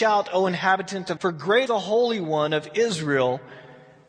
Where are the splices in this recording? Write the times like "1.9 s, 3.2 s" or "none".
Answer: 1.2 s, 1.7 s